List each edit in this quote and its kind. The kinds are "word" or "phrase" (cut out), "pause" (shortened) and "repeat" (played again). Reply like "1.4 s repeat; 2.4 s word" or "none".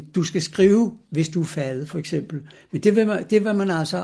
none